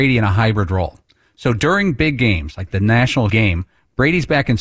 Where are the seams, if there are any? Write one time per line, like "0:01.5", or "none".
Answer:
0:03.3